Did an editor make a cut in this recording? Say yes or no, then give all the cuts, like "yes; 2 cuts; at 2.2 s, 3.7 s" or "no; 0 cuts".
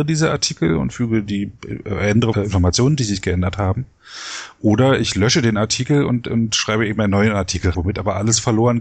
yes; 2 cuts; at 2.3 s, 7.7 s